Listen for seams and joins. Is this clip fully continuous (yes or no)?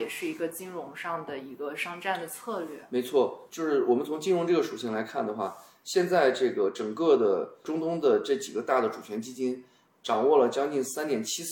yes